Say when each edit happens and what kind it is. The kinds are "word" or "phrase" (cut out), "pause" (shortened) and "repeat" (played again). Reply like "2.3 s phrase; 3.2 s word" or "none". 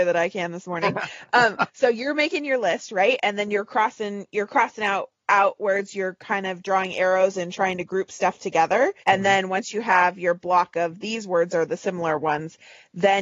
9.0 s pause